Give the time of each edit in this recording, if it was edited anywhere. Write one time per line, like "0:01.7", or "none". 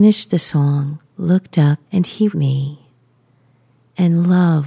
0:01.1
0:01.8
0:02.3